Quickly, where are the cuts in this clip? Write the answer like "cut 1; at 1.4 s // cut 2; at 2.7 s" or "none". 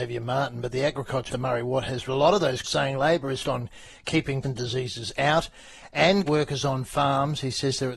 cut 1; at 1.3 s // cut 2; at 2.1 s // cut 3; at 2.6 s // cut 4; at 3.4 s // cut 5; at 4.4 s // cut 6; at 6.3 s